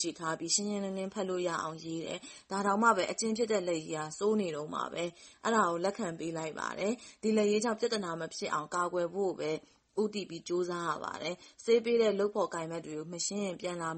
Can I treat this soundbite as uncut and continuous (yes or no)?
yes